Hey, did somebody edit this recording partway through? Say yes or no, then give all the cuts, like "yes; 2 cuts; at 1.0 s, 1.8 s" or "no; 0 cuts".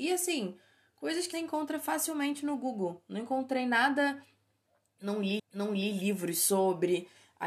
yes; 2 cuts; at 1.3 s, 5.4 s